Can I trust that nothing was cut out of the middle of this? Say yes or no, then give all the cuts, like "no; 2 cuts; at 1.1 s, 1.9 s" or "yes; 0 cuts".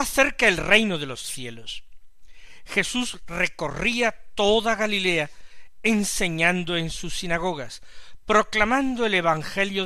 yes; 0 cuts